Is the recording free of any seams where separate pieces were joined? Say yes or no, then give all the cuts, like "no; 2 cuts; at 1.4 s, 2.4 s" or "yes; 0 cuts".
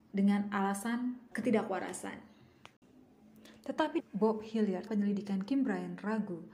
no; 3 cuts; at 1.3 s, 4.0 s, 4.9 s